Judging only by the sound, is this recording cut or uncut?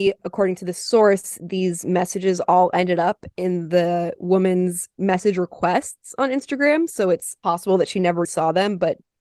cut